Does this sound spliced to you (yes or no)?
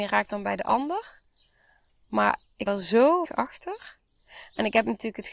yes